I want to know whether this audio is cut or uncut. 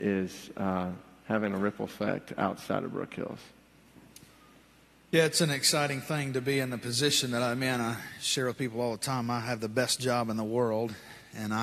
uncut